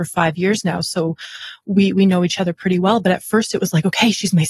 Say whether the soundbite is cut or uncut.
uncut